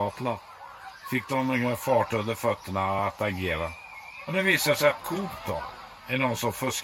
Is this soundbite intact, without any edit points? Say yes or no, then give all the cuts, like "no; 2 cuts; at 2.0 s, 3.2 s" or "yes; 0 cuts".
yes; 0 cuts